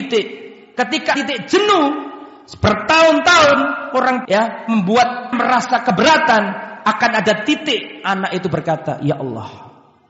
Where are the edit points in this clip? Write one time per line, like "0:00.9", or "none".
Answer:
0:01.1
0:04.2
0:05.3